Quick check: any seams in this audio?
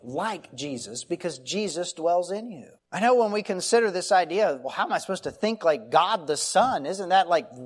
yes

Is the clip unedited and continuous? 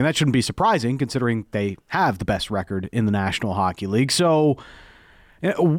yes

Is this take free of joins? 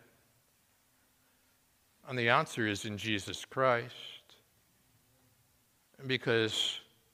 yes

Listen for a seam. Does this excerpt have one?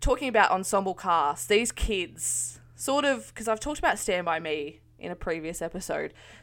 no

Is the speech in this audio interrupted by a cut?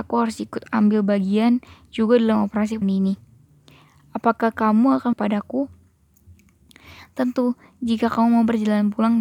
yes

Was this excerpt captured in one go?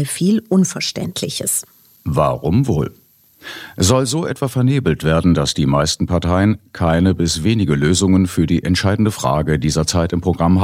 yes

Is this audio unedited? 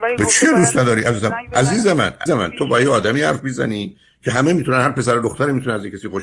no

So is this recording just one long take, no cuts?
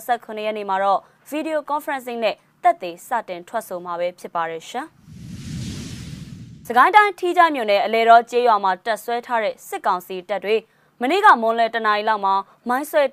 yes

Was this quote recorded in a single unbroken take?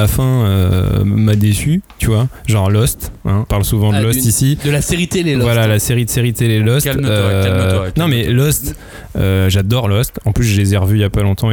no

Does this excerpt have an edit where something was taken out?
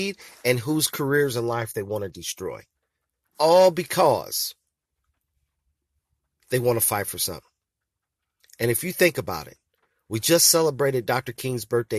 no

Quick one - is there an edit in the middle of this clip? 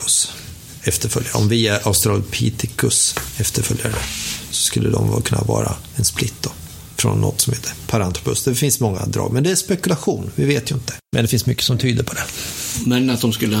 yes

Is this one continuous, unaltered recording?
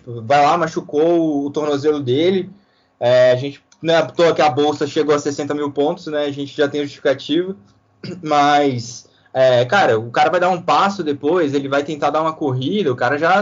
yes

